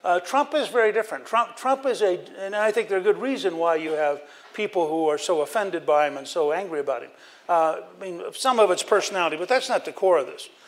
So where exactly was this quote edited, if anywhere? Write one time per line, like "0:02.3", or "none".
none